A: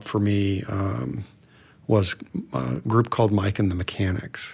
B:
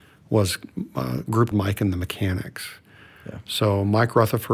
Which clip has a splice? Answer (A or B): B